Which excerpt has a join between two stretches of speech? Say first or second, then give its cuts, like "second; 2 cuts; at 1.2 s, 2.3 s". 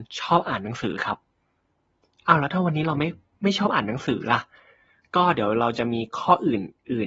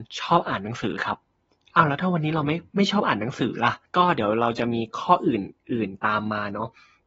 second; 3 cuts; at 1.3 s, 2.7 s, 3.9 s